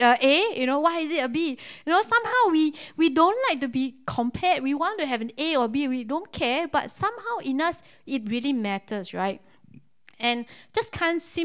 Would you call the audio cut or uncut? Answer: uncut